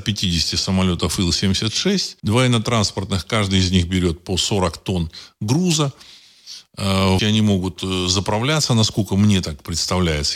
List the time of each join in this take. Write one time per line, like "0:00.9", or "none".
0:02.2
0:07.2